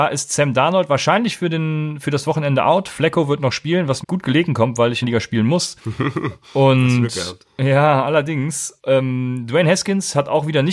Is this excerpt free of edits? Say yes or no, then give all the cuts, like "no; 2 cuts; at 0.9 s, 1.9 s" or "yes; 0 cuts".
no; 5 cuts; at 4.0 s, 5.0 s, 5.8 s, 7.4 s, 8.8 s